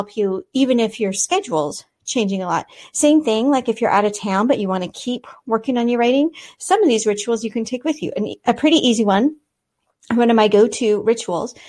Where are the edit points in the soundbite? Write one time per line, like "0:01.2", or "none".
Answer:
none